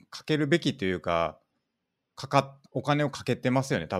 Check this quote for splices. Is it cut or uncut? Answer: cut